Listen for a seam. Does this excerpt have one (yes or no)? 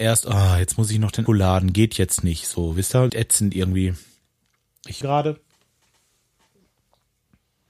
yes